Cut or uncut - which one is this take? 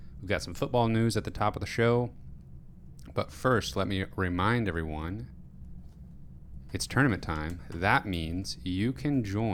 uncut